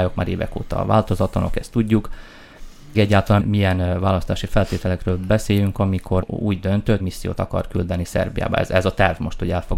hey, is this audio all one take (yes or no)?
no